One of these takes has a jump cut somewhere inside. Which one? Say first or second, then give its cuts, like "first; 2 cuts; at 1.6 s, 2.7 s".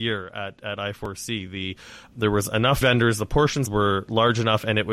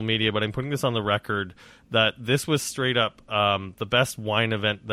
first; 3 cuts; at 2.1 s, 2.8 s, 3.7 s